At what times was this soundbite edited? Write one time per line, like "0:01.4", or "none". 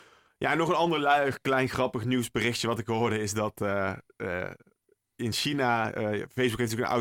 none